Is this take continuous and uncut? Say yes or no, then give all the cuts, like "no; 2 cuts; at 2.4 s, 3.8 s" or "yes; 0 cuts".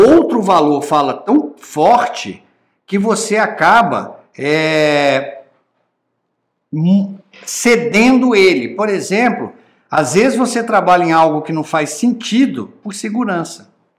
yes; 0 cuts